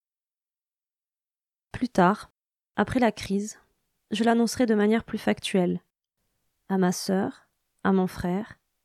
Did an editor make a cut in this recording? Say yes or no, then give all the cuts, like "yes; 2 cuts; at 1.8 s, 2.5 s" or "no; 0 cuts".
no; 0 cuts